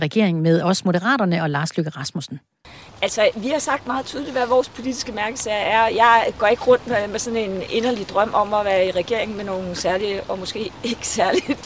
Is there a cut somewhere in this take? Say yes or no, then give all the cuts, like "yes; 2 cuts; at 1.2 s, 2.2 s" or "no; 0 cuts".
no; 0 cuts